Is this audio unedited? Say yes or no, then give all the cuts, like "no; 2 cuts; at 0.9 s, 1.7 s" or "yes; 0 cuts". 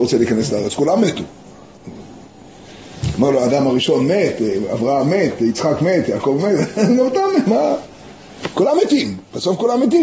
yes; 0 cuts